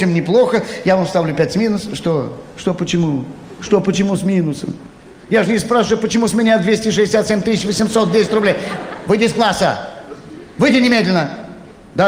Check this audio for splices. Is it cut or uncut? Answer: uncut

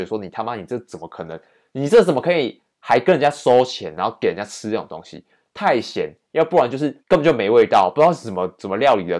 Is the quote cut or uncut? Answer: cut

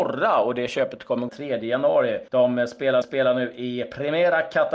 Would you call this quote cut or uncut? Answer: cut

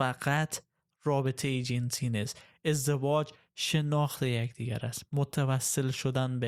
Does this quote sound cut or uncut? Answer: uncut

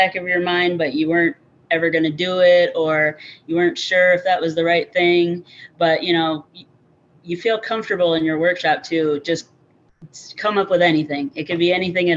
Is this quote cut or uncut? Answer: uncut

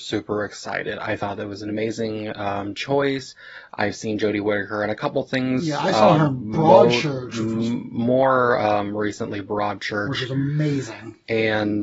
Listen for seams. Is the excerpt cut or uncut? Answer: uncut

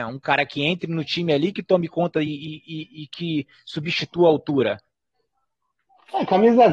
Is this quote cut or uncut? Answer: uncut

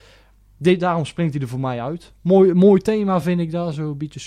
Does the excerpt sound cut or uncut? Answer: uncut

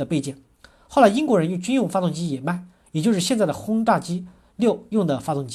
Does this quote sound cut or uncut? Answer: uncut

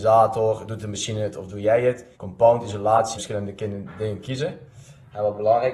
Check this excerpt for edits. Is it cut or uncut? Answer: cut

